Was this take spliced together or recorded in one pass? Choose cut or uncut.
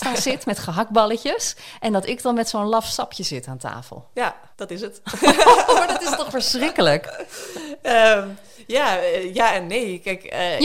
cut